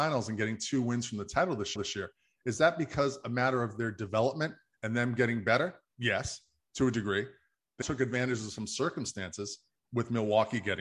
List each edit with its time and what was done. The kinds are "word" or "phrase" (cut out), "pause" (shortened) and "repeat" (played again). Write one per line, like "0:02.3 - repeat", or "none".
0:01.8 - repeat
0:07.8 - word